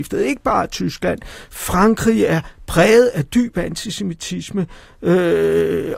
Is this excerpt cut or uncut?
uncut